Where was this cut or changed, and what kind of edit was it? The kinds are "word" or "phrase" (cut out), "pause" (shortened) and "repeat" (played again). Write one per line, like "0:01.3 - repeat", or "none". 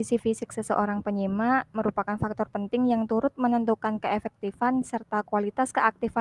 none